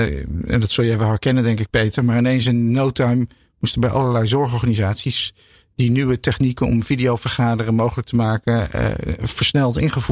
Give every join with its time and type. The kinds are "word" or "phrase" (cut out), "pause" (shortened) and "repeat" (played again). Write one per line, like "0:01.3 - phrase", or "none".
none